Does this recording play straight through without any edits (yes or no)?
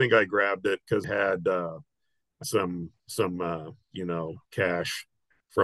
no